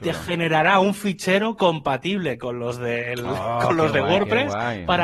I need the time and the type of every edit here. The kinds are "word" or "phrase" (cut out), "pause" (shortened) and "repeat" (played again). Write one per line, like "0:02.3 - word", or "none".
none